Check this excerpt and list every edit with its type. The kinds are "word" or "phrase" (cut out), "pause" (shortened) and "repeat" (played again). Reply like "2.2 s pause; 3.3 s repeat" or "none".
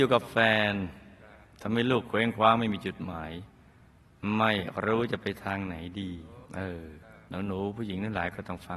6.4 s pause; 7.0 s pause